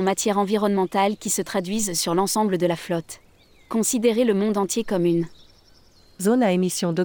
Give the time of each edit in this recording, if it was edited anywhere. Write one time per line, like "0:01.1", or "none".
none